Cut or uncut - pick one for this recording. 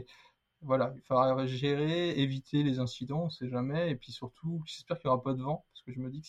uncut